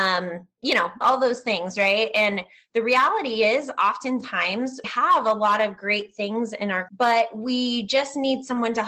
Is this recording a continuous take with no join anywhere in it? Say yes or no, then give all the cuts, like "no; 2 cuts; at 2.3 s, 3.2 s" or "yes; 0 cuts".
no; 3 cuts; at 1.0 s, 4.8 s, 6.9 s